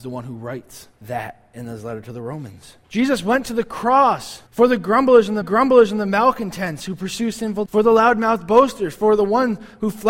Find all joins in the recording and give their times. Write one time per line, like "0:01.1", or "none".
0:01.0
0:02.8
0:04.5
0:05.4
0:07.7